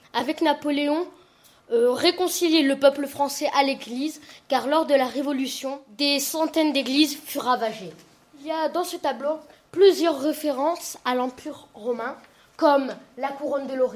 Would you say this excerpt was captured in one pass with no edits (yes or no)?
yes